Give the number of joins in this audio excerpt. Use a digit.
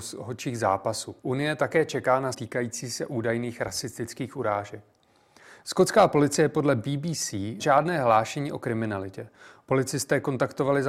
3